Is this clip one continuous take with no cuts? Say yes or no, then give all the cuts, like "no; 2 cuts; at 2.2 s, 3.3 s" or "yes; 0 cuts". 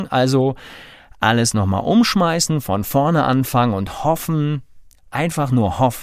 yes; 0 cuts